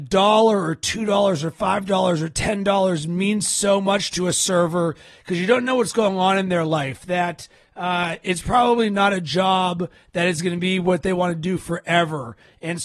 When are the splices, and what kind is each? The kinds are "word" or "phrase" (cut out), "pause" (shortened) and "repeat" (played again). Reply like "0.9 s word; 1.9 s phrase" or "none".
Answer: none